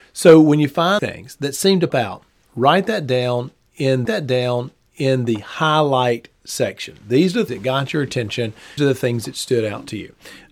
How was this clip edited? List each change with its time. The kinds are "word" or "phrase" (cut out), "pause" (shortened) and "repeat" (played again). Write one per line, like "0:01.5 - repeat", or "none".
0:01.0 - phrase
0:01.9 - word
0:04.1 - repeat
0:07.5 - word
0:08.8 - word